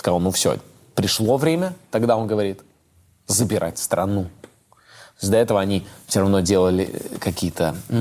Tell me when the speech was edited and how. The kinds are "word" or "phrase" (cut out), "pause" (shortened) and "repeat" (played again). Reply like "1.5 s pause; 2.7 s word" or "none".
none